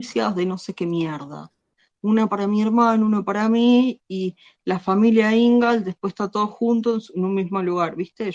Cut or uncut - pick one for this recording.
uncut